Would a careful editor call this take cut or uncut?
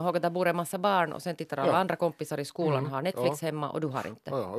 uncut